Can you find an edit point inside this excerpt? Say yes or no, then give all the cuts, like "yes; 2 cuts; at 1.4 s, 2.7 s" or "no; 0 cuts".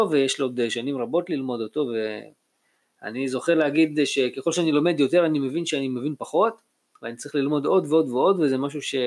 no; 0 cuts